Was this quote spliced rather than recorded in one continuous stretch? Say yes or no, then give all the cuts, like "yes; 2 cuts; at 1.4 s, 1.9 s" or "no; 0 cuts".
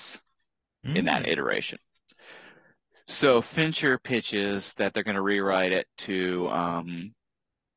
no; 0 cuts